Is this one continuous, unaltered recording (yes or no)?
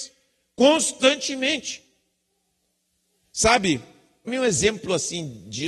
no